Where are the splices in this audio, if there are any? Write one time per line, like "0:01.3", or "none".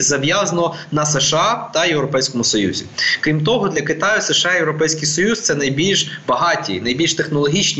none